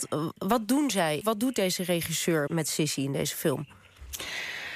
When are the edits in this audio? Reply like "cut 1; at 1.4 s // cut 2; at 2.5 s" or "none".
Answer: cut 1; at 1.2 s // cut 2; at 2.5 s